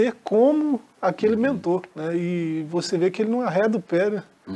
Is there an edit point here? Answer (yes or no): yes